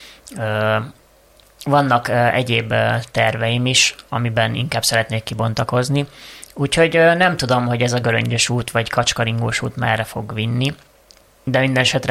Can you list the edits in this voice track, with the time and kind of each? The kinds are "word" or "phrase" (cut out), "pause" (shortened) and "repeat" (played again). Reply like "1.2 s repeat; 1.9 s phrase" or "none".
none